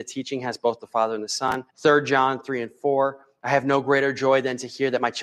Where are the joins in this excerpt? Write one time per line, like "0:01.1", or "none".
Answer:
0:01.7